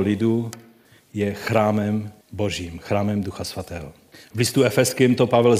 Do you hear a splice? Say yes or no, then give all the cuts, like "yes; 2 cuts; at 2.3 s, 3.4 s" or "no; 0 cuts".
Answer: yes; 2 cuts; at 2.2 s, 4.1 s